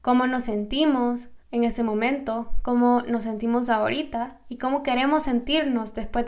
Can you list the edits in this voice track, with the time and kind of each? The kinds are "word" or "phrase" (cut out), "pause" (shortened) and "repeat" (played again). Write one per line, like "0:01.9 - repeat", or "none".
0:01.4 - pause